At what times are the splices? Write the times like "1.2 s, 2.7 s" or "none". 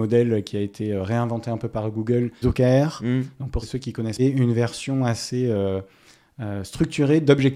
2.4 s, 3.6 s, 4.2 s